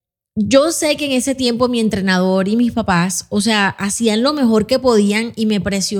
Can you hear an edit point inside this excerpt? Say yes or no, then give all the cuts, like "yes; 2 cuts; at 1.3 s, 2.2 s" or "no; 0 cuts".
no; 0 cuts